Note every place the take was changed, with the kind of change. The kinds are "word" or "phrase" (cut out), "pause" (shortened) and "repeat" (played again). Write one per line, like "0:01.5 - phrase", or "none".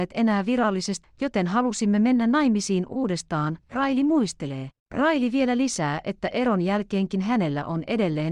0:01.0 - word
0:04.8 - pause